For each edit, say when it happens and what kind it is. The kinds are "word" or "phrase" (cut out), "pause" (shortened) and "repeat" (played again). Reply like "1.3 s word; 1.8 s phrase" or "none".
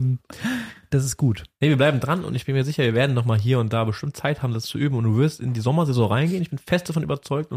none